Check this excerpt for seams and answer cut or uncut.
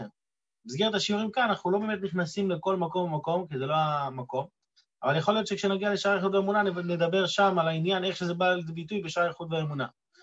uncut